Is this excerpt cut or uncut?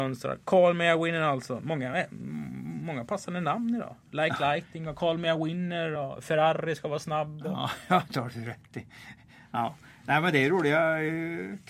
uncut